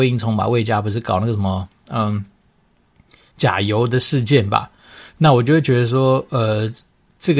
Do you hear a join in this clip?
no; 0 cuts

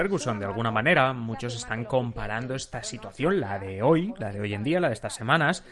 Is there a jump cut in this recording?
no; 0 cuts

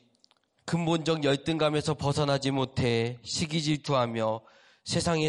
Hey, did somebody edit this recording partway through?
no; 0 cuts

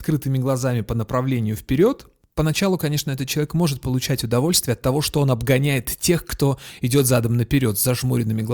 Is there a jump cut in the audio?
no; 0 cuts

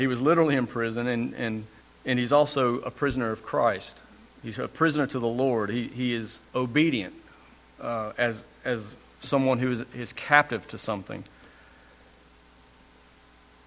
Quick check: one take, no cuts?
no; 2 cuts; at 1.8 s, 6.5 s

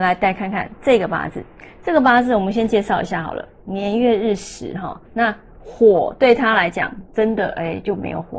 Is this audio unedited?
no; 1 cut; at 5.0 s

